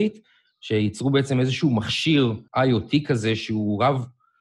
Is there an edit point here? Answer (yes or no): yes